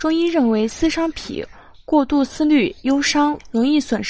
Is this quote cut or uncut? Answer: uncut